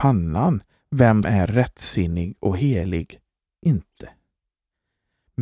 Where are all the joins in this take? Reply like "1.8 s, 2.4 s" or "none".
1.2 s, 3.6 s